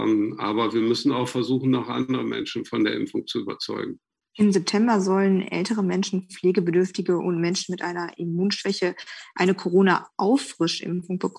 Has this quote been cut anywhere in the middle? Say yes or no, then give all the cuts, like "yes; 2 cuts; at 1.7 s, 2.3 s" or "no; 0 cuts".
no; 0 cuts